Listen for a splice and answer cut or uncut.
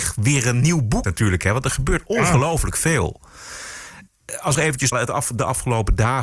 cut